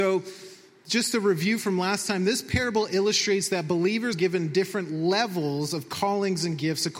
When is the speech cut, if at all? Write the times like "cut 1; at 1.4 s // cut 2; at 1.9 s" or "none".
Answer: cut 1; at 4.1 s